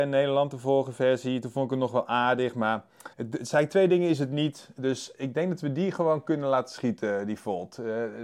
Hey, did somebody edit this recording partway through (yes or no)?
yes